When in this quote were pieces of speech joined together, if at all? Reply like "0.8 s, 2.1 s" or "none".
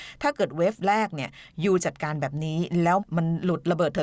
3.0 s